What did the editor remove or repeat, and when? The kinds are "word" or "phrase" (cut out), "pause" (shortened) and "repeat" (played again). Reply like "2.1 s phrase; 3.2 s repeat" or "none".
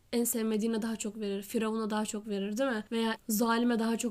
3.2 s word